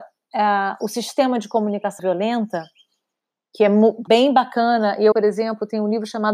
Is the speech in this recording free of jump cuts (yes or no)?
no